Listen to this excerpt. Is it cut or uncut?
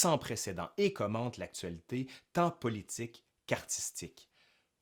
uncut